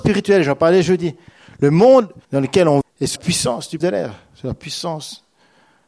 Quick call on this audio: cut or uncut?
cut